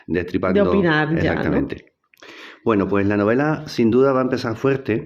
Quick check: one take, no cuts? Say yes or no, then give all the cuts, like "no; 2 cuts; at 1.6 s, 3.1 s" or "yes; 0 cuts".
yes; 0 cuts